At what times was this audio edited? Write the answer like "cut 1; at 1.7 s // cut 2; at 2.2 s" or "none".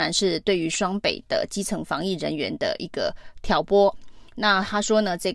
cut 1; at 4.3 s